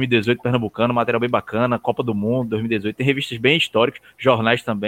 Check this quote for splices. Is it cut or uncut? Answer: uncut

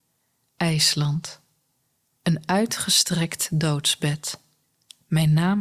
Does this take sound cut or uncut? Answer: uncut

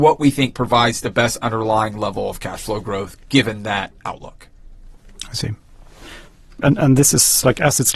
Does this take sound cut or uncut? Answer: uncut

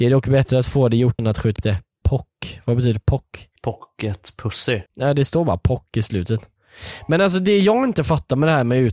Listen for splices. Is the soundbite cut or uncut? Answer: cut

